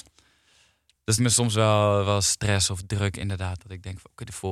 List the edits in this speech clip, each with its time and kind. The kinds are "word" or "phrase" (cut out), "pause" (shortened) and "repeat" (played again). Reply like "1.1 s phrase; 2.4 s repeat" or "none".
1.2 s phrase

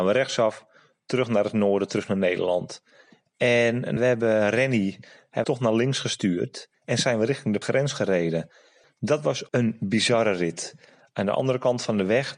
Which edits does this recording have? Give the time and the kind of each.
4.0 s word; 5.4 s word; 7.6 s word

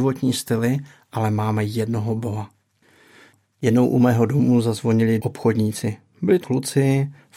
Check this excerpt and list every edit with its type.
5.2 s word; 6.4 s word

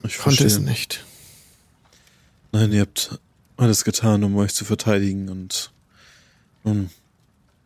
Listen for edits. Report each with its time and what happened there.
none

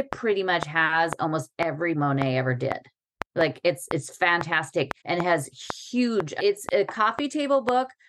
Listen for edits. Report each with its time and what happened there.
1.9 s word; 3.3 s pause; 5.0 s pause; 6.4 s phrase

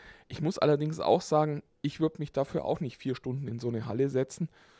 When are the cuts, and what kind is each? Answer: none

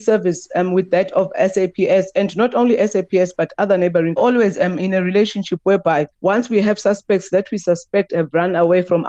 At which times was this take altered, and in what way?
4.2 s phrase; 6.1 s pause

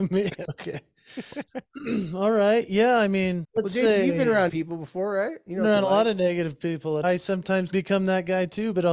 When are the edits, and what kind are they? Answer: 3.4 s word; 4.5 s word; 7.0 s word; 7.7 s word

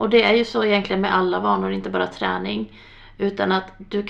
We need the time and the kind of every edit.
none

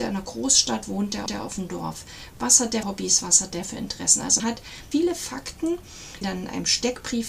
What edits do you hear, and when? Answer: 1.3 s repeat; 2.8 s word; 4.4 s word; 4.9 s word; 6.2 s phrase

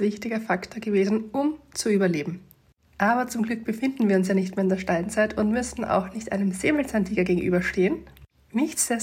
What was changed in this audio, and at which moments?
none

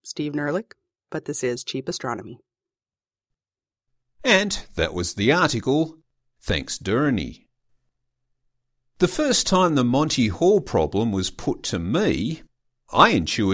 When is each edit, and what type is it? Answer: none

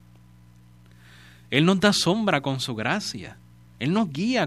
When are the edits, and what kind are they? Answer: none

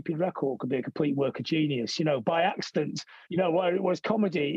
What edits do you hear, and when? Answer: 3.2 s pause

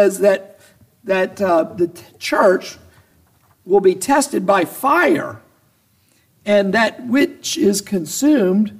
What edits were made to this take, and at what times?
none

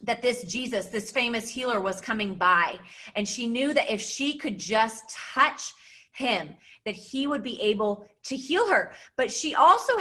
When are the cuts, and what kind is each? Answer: none

